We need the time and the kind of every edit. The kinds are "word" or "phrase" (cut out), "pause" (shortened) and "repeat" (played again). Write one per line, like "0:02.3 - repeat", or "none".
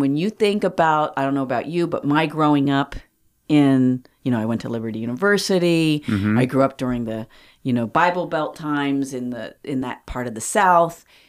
none